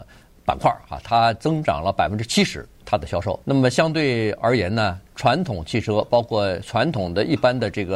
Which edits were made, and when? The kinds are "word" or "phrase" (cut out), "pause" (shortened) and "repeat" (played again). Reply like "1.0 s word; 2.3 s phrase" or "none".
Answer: 2.7 s pause; 3.4 s pause